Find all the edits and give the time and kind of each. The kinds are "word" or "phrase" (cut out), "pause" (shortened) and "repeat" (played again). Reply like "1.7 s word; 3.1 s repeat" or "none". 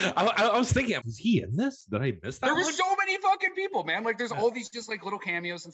1.0 s word